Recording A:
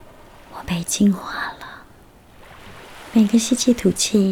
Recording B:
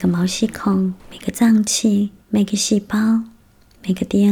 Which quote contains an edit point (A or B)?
B